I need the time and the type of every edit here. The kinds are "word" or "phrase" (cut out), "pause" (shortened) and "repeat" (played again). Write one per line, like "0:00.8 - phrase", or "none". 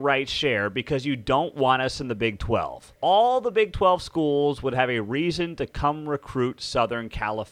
0:03.0 - pause